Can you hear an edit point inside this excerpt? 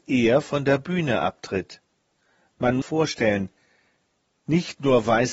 yes; 1 cut; at 2.8 s

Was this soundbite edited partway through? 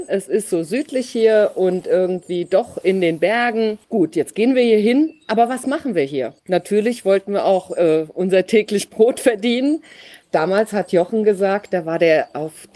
yes; 2 cuts; at 3.8 s, 6.4 s

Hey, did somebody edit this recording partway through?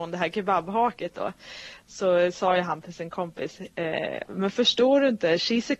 no; 0 cuts

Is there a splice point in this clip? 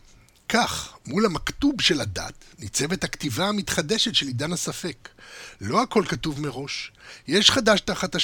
no; 0 cuts

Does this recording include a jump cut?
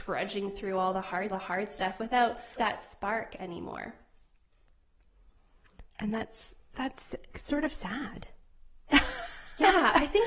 yes; 4 cuts; at 1.3 s, 2.6 s, 5.9 s, 6.7 s

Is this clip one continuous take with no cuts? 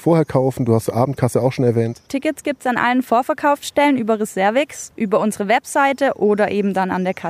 yes; 0 cuts

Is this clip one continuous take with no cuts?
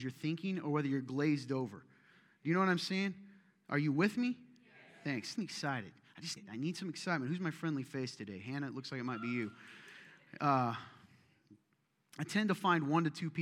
no; 2 cuts; at 5.4 s, 6.4 s

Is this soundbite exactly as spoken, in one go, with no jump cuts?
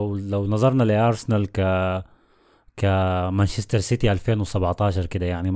yes; 0 cuts

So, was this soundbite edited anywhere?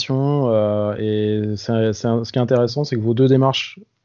no; 0 cuts

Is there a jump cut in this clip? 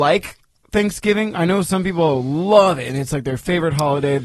no; 0 cuts

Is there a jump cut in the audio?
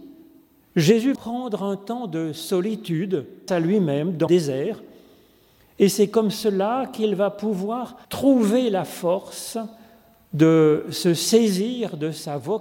yes; 4 cuts; at 1.2 s, 3.5 s, 4.3 s, 8.0 s

